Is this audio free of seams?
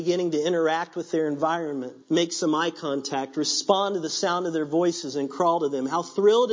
no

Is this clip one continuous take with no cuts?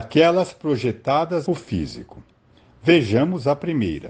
no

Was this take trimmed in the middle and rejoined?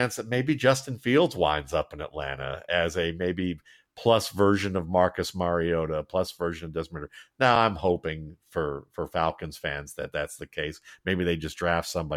no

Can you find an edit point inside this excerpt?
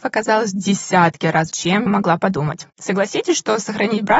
yes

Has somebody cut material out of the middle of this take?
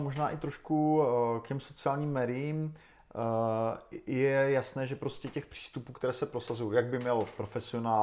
no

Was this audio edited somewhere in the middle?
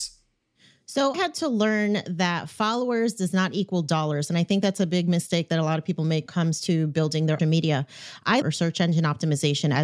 yes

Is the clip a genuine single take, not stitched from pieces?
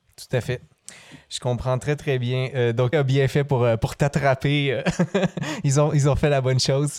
no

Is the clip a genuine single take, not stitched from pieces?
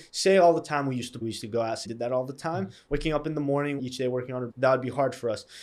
no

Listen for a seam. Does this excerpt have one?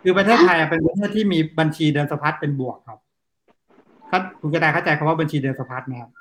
yes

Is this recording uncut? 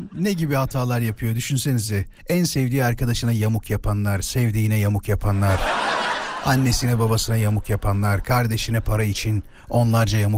no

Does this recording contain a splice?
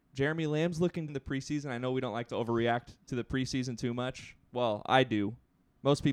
yes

